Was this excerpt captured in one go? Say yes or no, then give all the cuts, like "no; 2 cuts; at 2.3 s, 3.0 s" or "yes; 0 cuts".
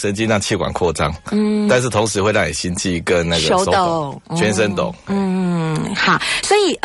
yes; 0 cuts